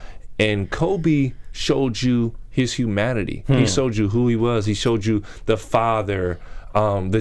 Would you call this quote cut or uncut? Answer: uncut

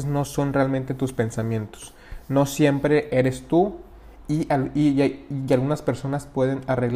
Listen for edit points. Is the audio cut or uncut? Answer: uncut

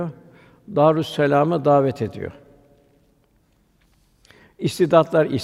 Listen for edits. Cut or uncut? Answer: uncut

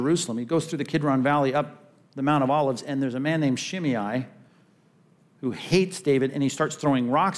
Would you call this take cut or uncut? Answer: uncut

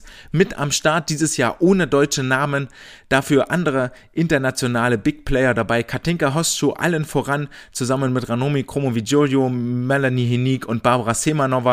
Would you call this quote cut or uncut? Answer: uncut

